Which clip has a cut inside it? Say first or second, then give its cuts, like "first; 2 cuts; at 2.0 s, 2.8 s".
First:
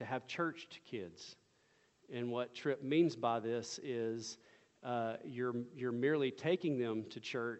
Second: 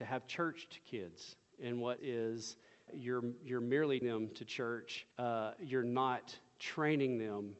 second; 5 cuts; at 1.5 s, 2.0 s, 2.9 s, 4.0 s, 5.1 s